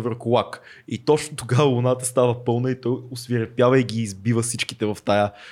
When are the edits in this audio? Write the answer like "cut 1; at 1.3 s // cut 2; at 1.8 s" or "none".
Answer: none